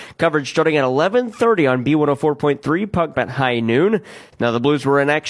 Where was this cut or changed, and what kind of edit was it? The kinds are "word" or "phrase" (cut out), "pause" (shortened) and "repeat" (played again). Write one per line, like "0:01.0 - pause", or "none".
0:03.1 - word